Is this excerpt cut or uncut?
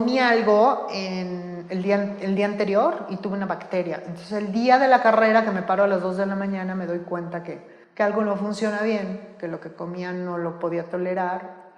cut